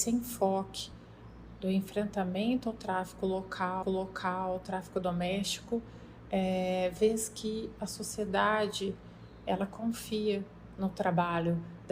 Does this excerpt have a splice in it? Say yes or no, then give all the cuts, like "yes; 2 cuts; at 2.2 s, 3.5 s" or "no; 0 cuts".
yes; 1 cut; at 3.8 s